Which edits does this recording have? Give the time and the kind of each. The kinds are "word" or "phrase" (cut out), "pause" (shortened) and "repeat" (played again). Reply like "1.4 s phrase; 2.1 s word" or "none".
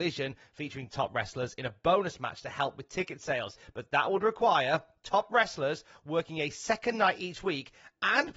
0.9 s word